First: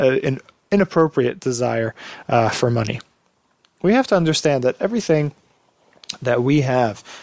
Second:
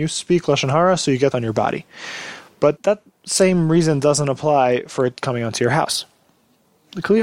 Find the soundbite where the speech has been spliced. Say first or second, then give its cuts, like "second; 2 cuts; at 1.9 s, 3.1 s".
second; 2 cuts; at 1.3 s, 2.8 s